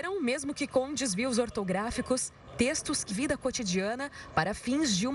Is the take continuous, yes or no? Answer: no